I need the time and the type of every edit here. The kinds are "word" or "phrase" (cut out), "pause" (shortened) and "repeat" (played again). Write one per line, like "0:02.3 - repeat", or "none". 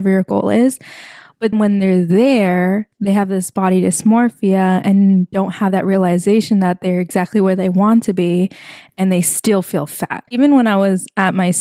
0:01.5 - word
0:10.3 - pause